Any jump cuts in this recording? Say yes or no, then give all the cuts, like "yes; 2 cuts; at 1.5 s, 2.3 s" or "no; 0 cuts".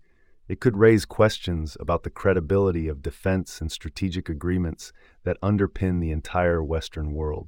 no; 0 cuts